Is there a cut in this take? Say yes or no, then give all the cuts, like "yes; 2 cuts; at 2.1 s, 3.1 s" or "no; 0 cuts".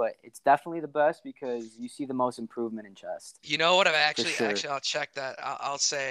no; 0 cuts